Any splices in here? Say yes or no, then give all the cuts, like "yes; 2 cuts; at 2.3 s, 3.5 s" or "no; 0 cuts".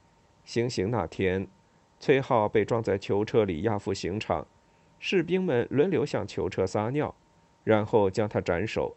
no; 0 cuts